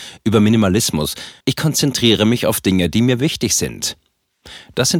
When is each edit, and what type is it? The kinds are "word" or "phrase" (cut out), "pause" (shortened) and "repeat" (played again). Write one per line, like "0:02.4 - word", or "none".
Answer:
0:01.4 - pause